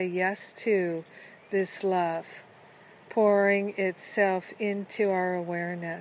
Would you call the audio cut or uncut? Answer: uncut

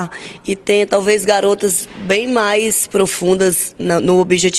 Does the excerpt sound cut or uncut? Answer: uncut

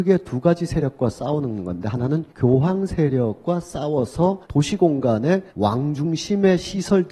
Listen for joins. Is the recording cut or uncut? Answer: cut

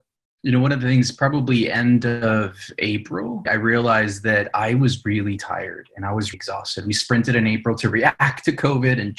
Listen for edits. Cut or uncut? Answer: cut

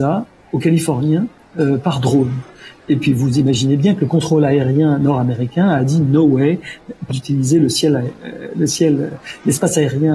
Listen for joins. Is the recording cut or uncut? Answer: cut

